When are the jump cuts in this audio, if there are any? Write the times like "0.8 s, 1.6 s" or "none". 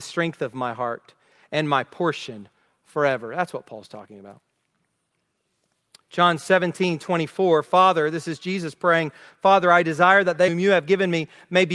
10.5 s

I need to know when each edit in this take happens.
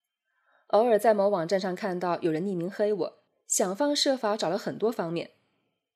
3.3 s

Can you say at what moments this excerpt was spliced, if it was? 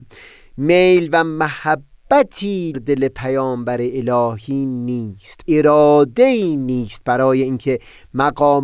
2.7 s, 5.4 s

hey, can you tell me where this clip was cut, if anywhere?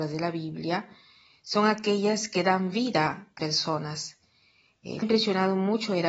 3.4 s, 5.0 s

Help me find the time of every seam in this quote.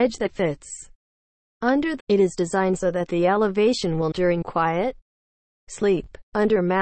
2.0 s, 4.1 s, 4.4 s

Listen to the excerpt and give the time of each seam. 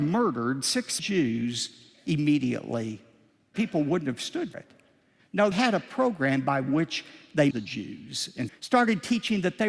1.0 s, 3.5 s, 4.5 s, 5.5 s, 7.5 s, 8.5 s

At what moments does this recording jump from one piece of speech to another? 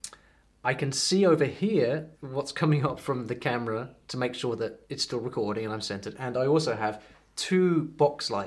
2.1 s, 4.8 s

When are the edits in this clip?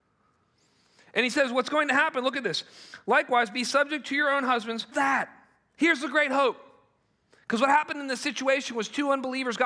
4.9 s

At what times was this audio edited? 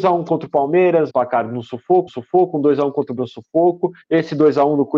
1.1 s, 2.1 s, 3.2 s, 4.0 s

